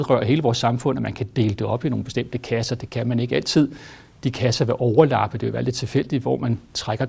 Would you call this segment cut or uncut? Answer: uncut